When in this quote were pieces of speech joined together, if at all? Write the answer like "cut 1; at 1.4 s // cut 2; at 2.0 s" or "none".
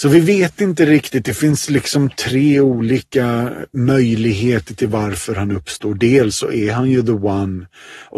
none